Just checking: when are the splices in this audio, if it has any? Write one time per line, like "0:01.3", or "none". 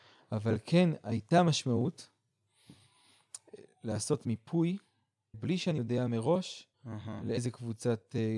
0:05.3
0:06.7